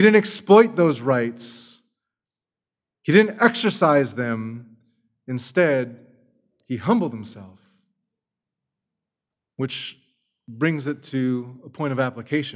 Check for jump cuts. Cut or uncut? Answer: uncut